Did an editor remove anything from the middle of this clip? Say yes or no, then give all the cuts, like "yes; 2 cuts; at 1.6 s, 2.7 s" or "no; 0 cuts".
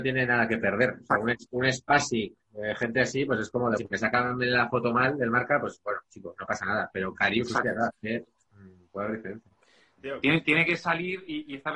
yes; 2 cuts; at 1.5 s, 3.8 s